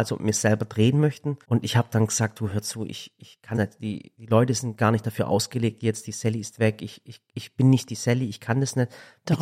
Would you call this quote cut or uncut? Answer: cut